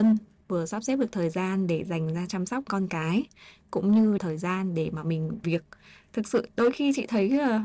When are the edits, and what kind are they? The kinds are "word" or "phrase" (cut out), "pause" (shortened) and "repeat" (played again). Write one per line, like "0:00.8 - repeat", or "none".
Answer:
0:04.2 - word
0:05.4 - word